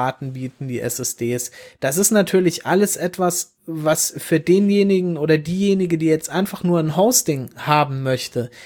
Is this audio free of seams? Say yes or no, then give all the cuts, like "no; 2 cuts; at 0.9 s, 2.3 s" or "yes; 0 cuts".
no; 1 cut; at 3.6 s